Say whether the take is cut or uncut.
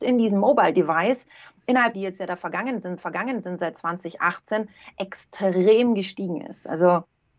cut